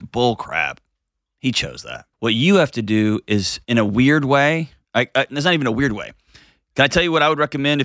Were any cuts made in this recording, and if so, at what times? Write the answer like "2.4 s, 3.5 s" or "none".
2.1 s, 3.6 s